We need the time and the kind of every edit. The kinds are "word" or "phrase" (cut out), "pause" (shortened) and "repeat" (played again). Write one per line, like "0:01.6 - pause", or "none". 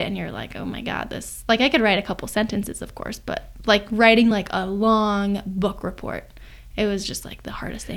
none